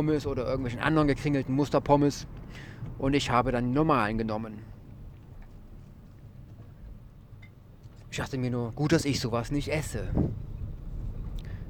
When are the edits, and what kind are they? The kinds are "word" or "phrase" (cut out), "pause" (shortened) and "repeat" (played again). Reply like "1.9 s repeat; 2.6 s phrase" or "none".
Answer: none